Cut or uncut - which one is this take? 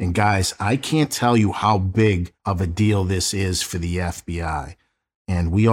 uncut